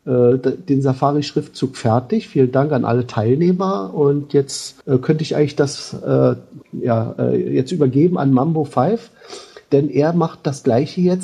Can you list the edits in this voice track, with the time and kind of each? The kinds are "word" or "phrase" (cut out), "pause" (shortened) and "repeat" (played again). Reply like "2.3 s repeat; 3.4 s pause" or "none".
4.8 s pause; 6.6 s pause